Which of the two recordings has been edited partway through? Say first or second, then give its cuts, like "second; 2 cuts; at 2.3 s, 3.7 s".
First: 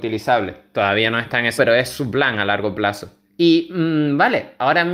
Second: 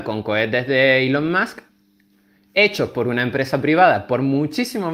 first; 2 cuts; at 1.6 s, 3.3 s